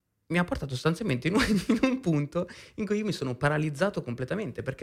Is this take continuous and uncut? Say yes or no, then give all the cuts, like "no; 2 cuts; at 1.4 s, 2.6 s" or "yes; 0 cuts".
yes; 0 cuts